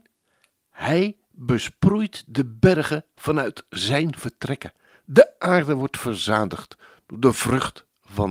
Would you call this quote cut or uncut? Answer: uncut